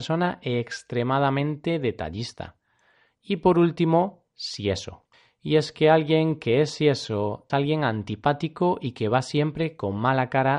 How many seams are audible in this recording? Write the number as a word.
two